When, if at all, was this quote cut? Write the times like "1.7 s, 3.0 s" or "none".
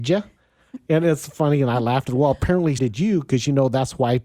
2.1 s, 2.8 s